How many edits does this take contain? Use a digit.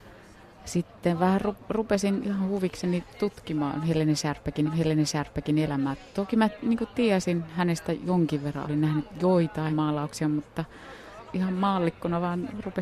5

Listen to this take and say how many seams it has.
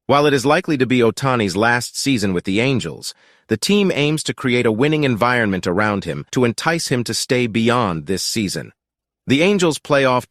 1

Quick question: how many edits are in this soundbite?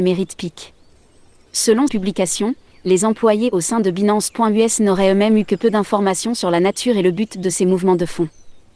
1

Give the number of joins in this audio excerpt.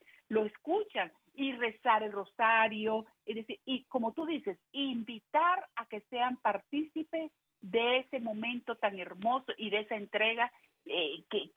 0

